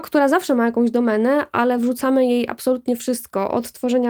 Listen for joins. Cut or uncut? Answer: uncut